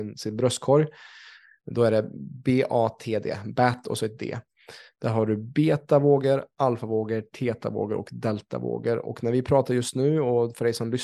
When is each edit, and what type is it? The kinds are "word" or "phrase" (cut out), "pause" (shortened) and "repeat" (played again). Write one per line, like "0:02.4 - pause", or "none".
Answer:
none